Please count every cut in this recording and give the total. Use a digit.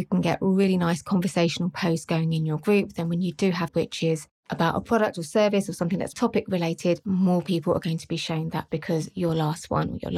3